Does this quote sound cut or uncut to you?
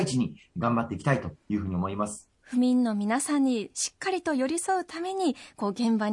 cut